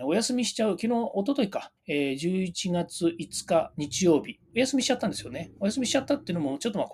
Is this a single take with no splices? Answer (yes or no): no